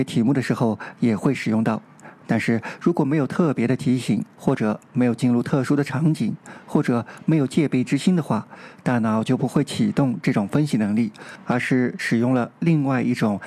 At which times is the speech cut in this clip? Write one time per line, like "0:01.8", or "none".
0:04.3